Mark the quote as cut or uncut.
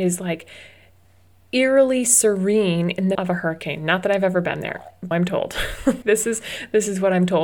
cut